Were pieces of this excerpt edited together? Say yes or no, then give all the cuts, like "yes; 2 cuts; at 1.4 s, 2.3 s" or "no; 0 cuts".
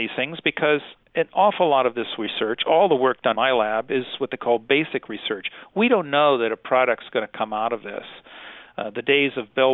yes; 1 cut; at 3.3 s